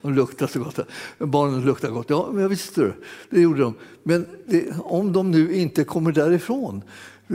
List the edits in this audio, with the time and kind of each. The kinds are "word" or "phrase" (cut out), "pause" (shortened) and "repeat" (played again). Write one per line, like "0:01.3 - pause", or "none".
none